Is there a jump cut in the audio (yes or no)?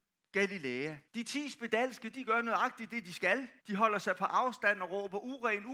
yes